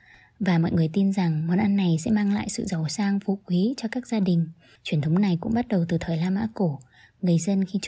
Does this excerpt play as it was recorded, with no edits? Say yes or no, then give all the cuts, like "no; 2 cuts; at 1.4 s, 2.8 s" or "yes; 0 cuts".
yes; 0 cuts